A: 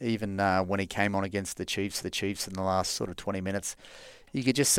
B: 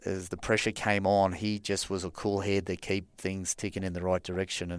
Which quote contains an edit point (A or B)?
A